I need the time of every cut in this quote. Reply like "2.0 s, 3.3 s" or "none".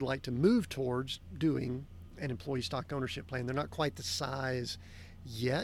none